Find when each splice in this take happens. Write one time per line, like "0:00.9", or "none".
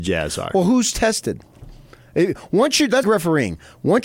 0:03.0